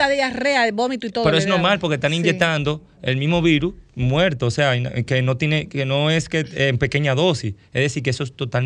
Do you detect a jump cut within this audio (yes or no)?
no